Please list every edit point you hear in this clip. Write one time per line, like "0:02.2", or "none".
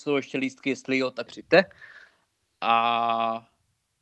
0:01.3